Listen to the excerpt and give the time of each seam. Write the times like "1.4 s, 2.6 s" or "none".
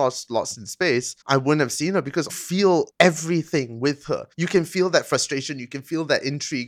1.2 s, 2.3 s, 2.9 s, 4.3 s